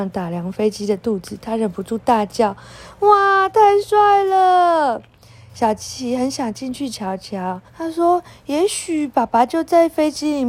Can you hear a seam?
yes; 1 cut; at 7.7 s

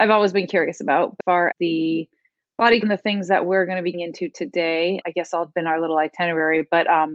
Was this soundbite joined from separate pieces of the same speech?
yes; 6 cuts; at 1.2 s, 1.5 s, 2.8 s, 3.9 s, 5.0 s, 5.5 s

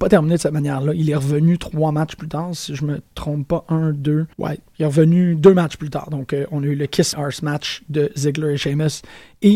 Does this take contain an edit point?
yes; 2 cuts; at 4.3 s, 7.1 s

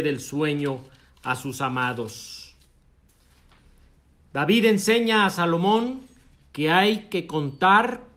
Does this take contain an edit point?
no; 0 cuts

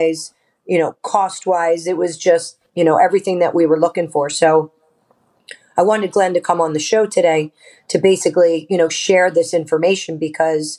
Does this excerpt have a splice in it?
no; 0 cuts

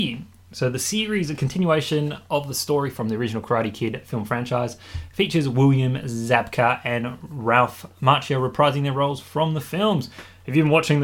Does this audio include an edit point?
no; 0 cuts

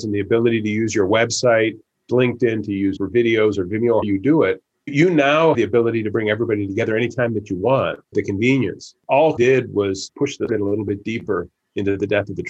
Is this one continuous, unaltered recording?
no; 9 cuts; at 2.1 s, 3.0 s, 4.0 s, 4.9 s, 5.5 s, 8.1 s, 9.4 s, 10.1 s, 10.5 s

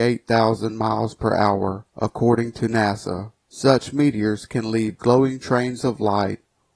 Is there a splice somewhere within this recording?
yes; 2 cuts; at 1.9 s, 3.4 s

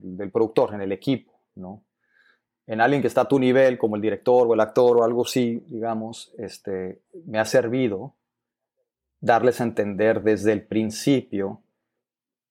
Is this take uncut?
yes; 0 cuts

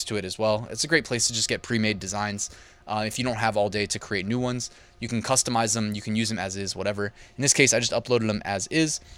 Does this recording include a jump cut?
no; 0 cuts

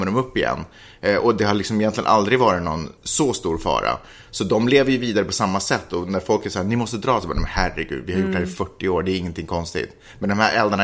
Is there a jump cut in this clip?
yes; 1 cut; at 3.0 s

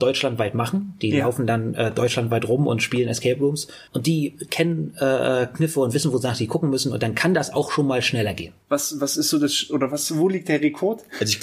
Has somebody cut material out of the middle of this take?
yes; 2 cuts; at 3.9 s, 8.6 s

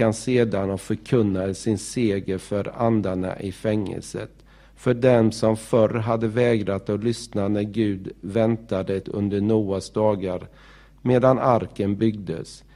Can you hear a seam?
yes; 1 cut; at 9.0 s

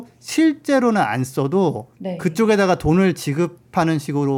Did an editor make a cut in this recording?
yes; 1 cut; at 1.9 s

